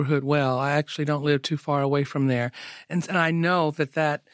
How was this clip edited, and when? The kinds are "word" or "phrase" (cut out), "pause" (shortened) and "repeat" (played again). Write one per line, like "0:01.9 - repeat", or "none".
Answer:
none